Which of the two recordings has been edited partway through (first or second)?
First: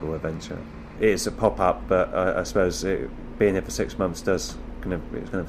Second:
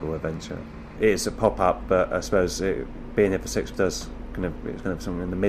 second